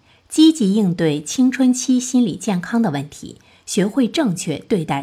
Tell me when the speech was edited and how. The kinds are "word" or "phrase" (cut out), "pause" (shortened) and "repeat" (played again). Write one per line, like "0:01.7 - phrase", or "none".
none